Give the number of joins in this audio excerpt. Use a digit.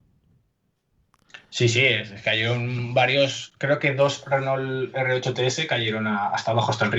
1